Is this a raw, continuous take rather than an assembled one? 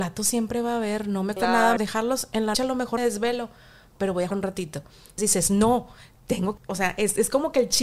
no; 8 cuts; at 1.4 s, 1.8 s, 2.5 s, 3.0 s, 4.0 s, 4.3 s, 5.2 s, 6.6 s

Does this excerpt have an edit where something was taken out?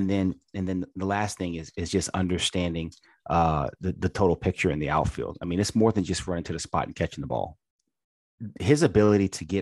no; 0 cuts

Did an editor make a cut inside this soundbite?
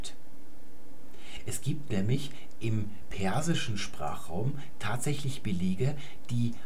no; 0 cuts

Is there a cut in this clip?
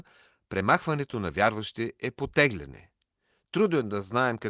no; 0 cuts

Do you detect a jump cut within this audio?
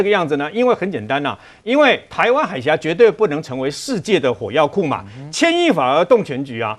no; 0 cuts

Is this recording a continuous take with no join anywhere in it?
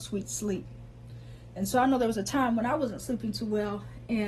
yes; 0 cuts

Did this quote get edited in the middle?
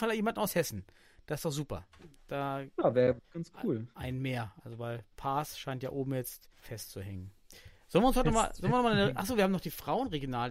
yes; 2 cuts; at 3.2 s, 6.5 s

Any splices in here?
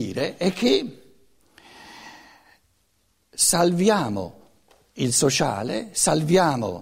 no; 0 cuts

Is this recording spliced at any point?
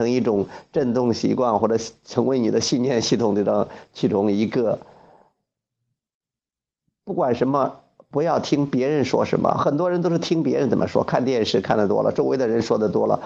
no; 0 cuts

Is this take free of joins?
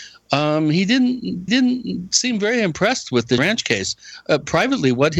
no; 2 cuts; at 1.5 s, 3.4 s

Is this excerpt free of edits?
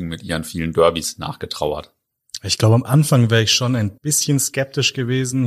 no; 1 cut; at 4.0 s

